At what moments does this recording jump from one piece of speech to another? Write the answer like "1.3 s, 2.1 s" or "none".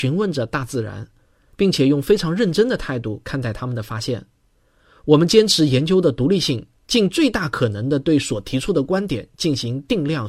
none